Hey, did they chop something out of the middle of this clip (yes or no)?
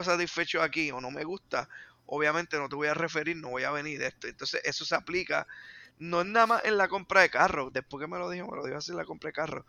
no